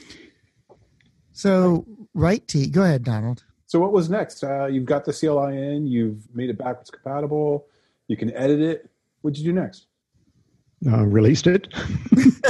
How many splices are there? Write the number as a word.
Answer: one